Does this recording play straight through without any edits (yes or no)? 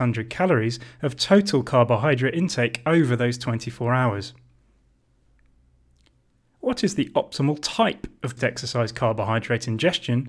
no